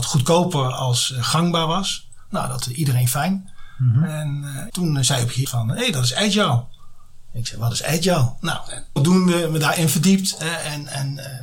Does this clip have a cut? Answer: yes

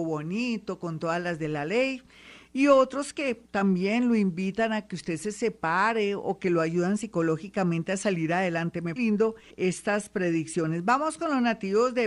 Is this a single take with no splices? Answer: no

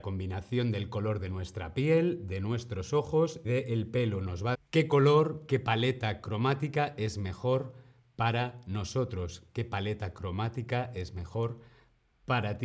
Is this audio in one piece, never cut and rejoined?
no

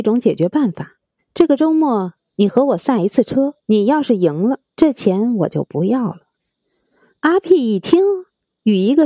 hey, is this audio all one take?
no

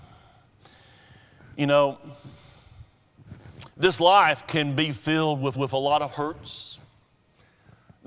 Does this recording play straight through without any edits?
no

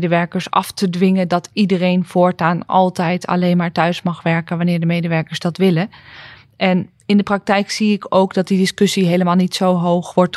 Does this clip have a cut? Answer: no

